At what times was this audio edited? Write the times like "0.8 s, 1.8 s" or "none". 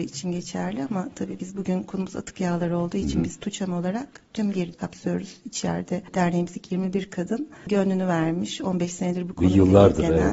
4.7 s